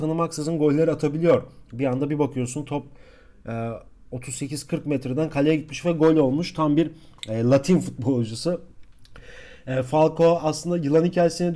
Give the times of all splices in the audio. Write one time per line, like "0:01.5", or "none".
none